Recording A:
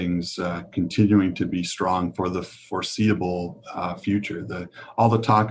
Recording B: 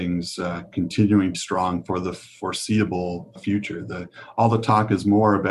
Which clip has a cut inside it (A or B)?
B